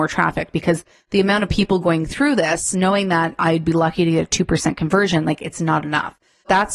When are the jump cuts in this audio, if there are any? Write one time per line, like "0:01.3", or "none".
none